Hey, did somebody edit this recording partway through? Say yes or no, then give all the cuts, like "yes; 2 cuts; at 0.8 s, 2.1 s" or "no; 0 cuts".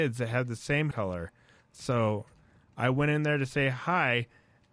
yes; 1 cut; at 0.9 s